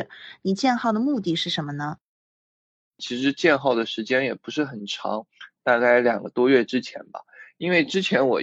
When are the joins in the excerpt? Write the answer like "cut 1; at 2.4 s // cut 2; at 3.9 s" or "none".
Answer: cut 1; at 2.3 s